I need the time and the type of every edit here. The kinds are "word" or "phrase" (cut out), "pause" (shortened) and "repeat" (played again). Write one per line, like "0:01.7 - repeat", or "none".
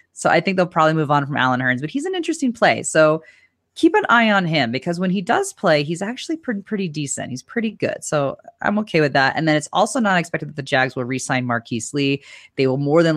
none